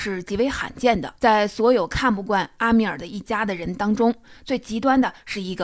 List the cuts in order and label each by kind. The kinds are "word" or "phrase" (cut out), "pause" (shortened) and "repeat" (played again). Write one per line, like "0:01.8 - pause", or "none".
0:01.2 - pause

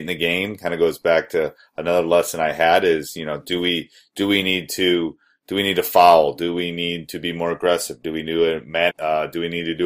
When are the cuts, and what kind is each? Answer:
0:08.9 - word

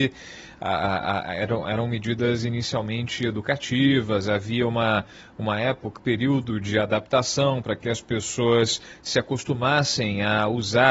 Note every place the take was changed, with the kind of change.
0:06.0 - word

